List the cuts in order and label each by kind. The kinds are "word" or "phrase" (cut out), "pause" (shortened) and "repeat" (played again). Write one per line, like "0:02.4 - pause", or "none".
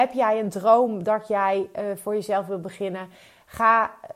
none